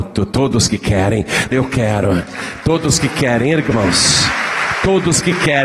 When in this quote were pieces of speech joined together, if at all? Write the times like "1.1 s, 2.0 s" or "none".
1.5 s, 3.7 s